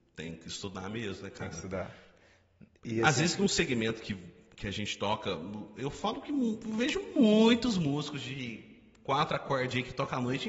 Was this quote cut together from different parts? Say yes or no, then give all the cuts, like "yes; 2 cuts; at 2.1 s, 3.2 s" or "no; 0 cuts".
no; 0 cuts